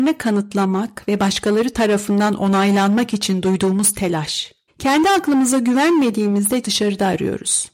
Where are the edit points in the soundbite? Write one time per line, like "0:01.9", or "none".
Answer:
0:04.7
0:06.6